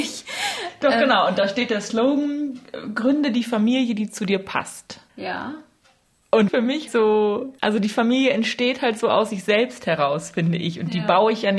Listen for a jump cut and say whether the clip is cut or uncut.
cut